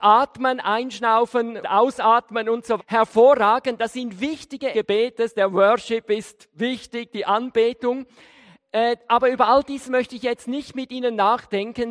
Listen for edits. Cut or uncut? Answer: cut